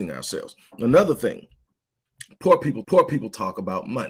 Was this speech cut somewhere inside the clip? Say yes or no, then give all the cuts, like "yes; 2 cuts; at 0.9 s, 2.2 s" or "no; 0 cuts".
yes; 1 cut; at 2.8 s